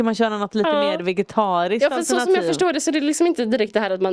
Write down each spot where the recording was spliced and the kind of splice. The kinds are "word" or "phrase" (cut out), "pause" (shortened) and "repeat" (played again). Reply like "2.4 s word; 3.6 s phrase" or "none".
none